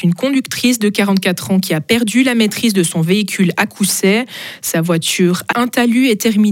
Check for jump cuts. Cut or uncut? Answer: cut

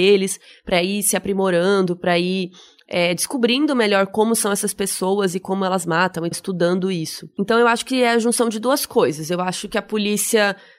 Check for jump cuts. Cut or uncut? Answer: cut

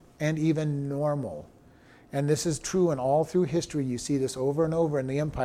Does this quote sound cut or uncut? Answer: uncut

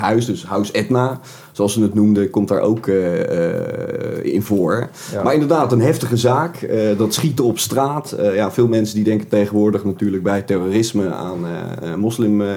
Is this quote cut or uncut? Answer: uncut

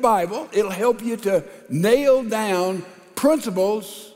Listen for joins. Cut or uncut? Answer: uncut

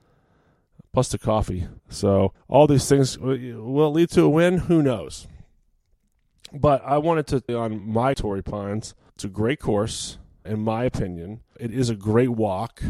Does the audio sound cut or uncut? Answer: cut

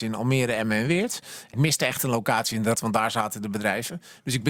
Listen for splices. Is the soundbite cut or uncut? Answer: cut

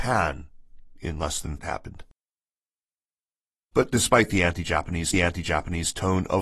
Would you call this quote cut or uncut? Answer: cut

